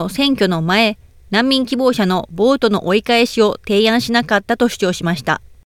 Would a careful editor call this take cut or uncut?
uncut